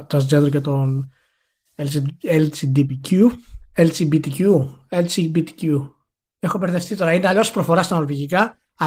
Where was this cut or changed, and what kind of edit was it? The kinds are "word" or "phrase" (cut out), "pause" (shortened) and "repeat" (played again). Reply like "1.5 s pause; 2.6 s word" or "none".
none